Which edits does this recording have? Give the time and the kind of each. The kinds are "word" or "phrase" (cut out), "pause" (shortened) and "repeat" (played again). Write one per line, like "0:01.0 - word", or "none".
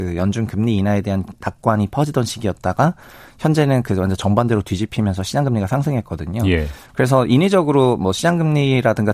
none

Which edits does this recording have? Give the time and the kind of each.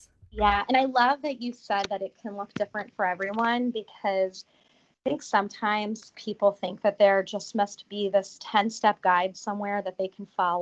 none

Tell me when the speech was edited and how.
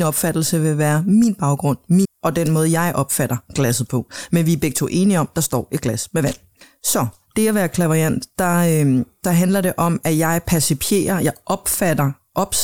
0:02.0 - word

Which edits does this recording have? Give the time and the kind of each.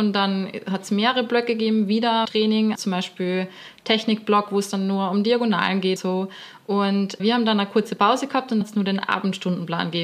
0:02.2 - word
0:02.7 - word
0:06.0 - word
0:07.2 - word
0:08.6 - word

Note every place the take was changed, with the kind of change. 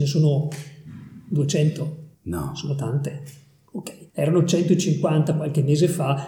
0:02.1 - pause
0:04.1 - pause

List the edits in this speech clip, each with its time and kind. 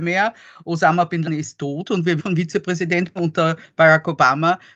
0:01.2 - word
0:02.2 - word
0:03.2 - word

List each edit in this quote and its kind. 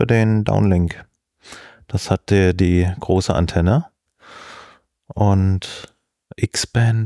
none

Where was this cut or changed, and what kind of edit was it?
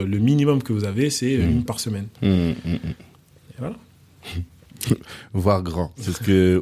0:01.7 - phrase

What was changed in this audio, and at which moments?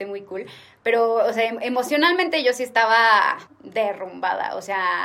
0:03.5 - pause

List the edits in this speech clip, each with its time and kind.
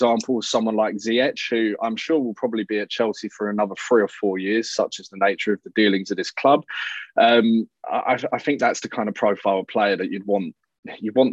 none

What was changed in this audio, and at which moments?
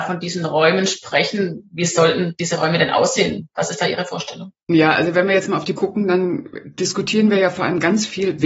0:04.6 - pause
0:05.7 - word

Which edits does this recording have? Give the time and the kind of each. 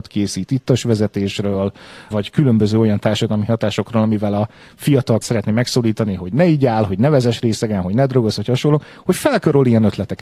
0:02.1 - word
0:05.2 - word

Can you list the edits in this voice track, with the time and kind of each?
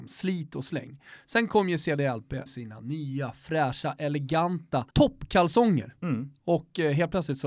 0:02.5 - word
0:04.9 - pause

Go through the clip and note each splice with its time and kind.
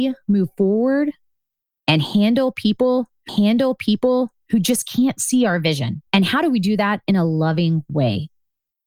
0:03.3 - repeat
0:06.1 - pause

